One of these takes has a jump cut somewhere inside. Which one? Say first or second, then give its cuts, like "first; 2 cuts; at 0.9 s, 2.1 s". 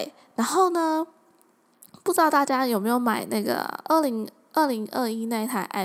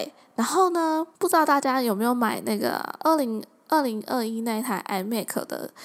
second; 1 cut; at 1.1 s